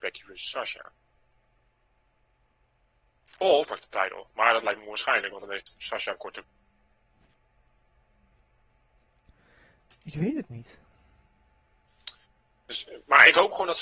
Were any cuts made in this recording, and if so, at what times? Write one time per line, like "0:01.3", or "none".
0:03.6